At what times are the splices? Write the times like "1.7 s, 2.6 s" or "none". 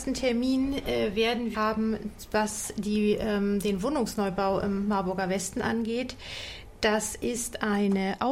1.5 s